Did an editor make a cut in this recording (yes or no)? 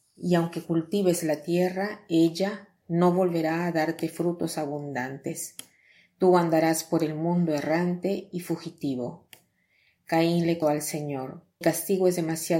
yes